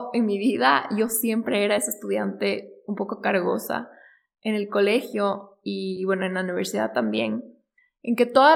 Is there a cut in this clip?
no; 0 cuts

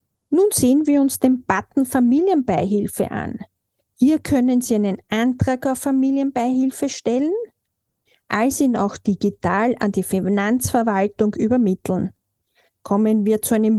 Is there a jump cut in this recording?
no; 0 cuts

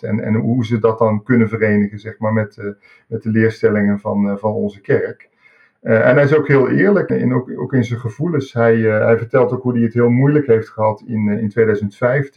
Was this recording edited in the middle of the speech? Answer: yes; 1 cut; at 7.1 s

